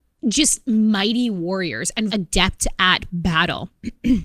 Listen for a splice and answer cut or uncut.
cut